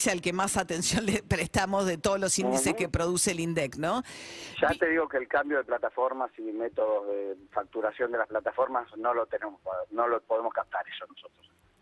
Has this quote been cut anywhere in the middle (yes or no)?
no